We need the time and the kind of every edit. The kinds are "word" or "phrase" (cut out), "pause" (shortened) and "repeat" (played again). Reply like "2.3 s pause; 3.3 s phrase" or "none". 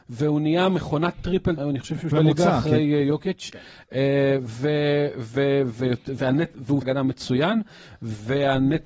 1.6 s word; 2.1 s word; 6.8 s word